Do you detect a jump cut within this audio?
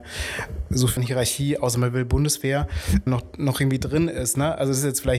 yes; 2 cuts; at 1.0 s, 3.1 s

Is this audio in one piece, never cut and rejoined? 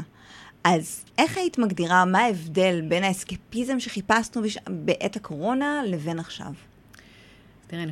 no; 1 cut; at 1.1 s

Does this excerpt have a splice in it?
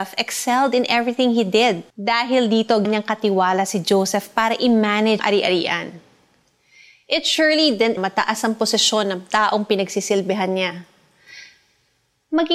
yes; 4 cuts; at 1.9 s, 2.8 s, 5.2 s, 8.0 s

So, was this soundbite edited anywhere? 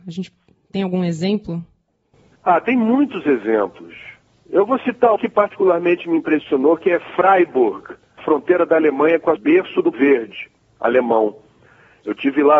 yes; 4 cuts; at 5.2 s, 8.2 s, 9.4 s, 9.9 s

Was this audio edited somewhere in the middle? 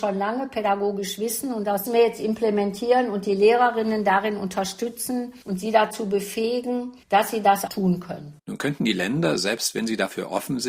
yes; 5 cuts; at 1.9 s, 5.4 s, 7.0 s, 7.7 s, 8.4 s

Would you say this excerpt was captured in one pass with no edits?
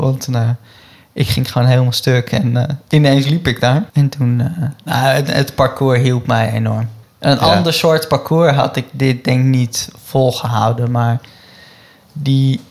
no; 2 cuts; at 3.9 s, 7.0 s

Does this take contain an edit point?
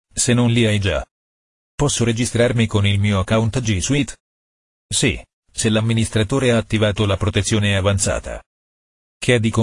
no; 0 cuts

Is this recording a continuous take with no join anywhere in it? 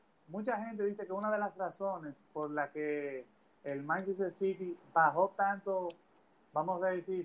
yes; 0 cuts

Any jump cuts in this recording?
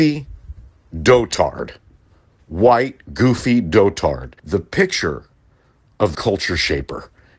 yes; 2 cuts; at 4.4 s, 6.1 s

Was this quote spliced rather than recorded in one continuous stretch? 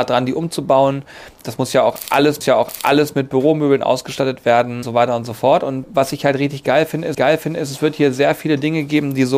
yes; 4 cuts; at 2.4 s, 4.8 s, 5.8 s, 7.1 s

